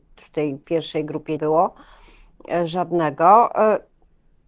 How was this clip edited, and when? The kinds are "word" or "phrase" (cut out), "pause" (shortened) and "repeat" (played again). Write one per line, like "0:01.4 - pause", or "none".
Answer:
0:01.4 - word